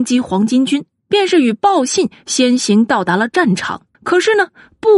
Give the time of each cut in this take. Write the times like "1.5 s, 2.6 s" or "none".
3.9 s